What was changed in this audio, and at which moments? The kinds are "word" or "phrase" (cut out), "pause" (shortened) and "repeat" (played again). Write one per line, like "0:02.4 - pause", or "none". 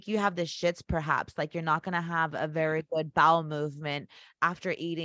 none